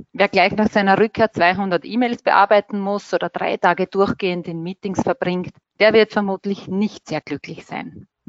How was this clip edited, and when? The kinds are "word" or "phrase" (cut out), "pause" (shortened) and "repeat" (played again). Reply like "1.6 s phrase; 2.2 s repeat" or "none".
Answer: none